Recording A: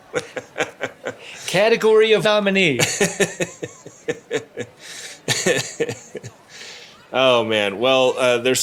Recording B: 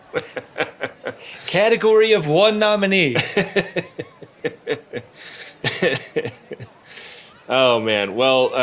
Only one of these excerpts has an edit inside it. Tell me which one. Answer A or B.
A